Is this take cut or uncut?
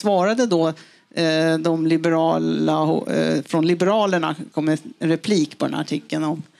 uncut